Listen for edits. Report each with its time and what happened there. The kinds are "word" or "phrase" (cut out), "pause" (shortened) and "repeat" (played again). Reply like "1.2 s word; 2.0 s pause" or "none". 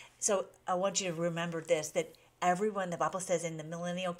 none